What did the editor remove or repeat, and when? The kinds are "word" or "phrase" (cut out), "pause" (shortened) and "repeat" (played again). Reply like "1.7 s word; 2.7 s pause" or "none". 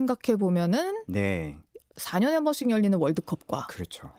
none